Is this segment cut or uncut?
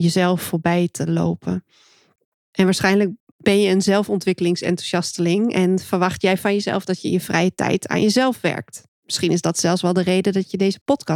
uncut